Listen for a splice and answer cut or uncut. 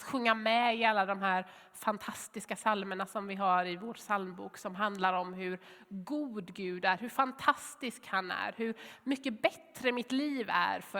uncut